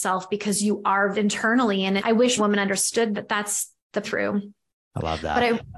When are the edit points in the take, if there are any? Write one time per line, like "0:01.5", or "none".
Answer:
0:01.1
0:02.0
0:02.4
0:03.1
0:04.0